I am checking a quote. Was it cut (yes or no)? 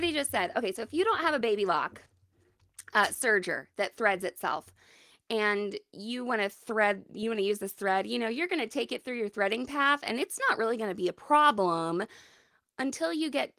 no